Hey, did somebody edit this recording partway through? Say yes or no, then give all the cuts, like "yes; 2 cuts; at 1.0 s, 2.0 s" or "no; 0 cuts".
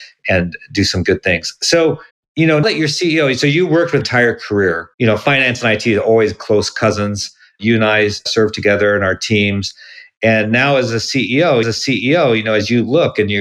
yes; 5 cuts; at 2.1 s, 2.6 s, 4.0 s, 4.9 s, 11.6 s